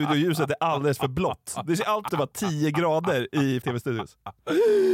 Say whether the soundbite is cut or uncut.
cut